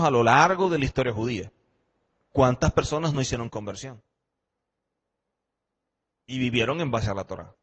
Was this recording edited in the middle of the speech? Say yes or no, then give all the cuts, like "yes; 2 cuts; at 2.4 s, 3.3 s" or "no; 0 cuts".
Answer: no; 0 cuts